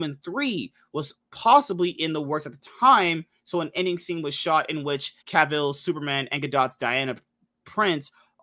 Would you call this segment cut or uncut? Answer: cut